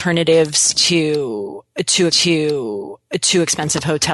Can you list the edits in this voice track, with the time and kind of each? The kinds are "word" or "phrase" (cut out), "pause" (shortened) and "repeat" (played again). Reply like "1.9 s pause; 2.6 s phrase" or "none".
2.1 s repeat